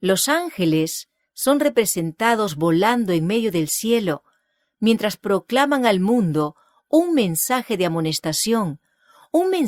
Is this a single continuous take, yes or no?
yes